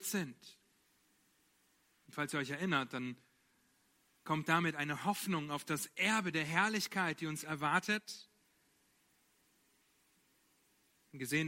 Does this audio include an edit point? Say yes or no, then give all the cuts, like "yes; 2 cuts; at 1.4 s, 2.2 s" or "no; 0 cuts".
no; 0 cuts